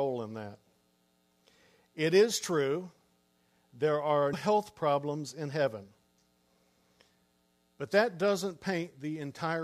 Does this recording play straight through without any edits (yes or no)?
no